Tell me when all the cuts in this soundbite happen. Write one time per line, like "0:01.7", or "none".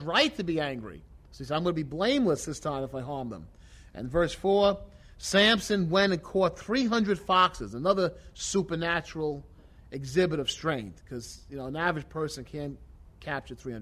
none